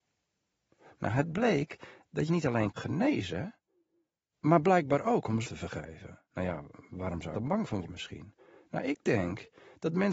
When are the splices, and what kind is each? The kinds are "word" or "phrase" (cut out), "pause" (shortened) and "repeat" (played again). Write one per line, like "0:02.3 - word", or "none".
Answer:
0:02.3 - word
0:02.8 - phrase
0:05.4 - word
0:06.2 - pause
0:07.3 - phrase
0:07.8 - phrase